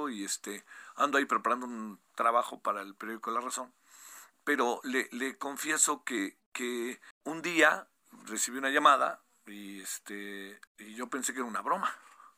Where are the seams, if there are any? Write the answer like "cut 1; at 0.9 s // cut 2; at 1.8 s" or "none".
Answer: cut 1; at 7.1 s // cut 2; at 10.7 s